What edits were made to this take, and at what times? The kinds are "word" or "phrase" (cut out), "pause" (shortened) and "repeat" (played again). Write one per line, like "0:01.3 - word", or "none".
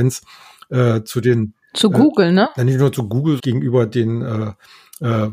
0:01.6 - pause
0:03.4 - phrase